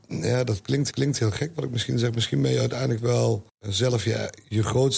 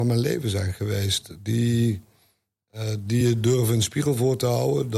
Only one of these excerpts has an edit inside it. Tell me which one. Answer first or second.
first